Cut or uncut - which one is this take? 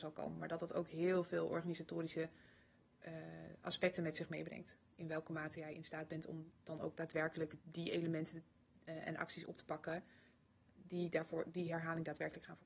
cut